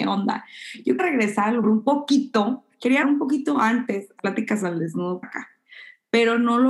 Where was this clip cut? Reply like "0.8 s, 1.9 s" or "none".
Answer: 1.0 s, 1.6 s, 3.0 s, 4.2 s, 5.2 s